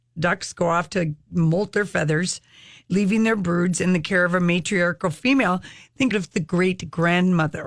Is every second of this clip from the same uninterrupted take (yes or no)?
no